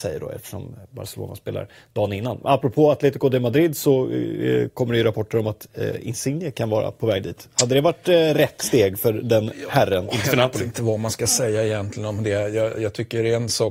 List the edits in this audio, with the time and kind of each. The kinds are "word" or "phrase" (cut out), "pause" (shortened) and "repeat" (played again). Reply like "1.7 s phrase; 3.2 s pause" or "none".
none